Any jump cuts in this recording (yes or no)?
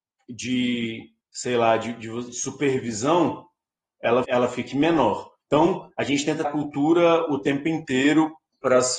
yes